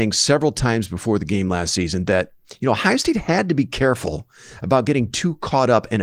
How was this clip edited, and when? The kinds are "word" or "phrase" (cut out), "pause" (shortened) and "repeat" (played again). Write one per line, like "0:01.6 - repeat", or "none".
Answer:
none